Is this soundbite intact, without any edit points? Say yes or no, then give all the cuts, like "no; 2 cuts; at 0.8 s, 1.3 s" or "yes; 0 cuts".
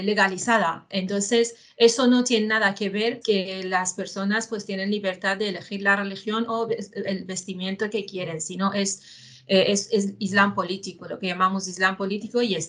no; 1 cut; at 3.2 s